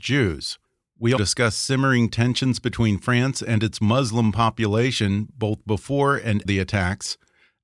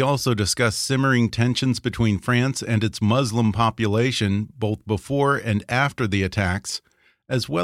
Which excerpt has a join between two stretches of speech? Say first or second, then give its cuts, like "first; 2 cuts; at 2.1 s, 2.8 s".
first; 2 cuts; at 1.2 s, 6.4 s